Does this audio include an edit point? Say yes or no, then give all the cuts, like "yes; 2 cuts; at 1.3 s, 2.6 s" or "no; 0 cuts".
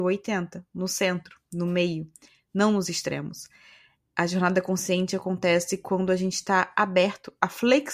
no; 0 cuts